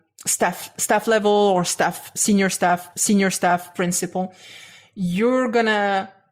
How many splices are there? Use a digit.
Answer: 1